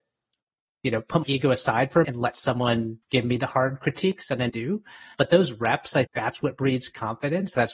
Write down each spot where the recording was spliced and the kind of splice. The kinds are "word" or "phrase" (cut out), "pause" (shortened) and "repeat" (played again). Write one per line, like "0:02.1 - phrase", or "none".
0:01.2 - word
0:02.0 - word
0:03.0 - pause
0:04.5 - phrase
0:05.1 - word
0:06.0 - word